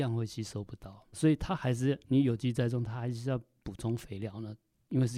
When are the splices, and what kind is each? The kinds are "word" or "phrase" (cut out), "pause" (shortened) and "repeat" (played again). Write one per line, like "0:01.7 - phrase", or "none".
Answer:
0:02.0 - pause